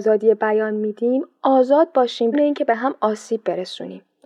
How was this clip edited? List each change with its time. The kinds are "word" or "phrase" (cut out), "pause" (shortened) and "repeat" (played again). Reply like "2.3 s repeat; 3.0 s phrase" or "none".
2.3 s word